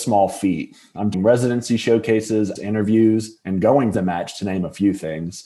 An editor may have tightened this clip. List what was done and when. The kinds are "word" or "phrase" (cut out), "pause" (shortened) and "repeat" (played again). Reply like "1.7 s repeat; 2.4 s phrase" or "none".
1.1 s word; 2.6 s word; 3.9 s word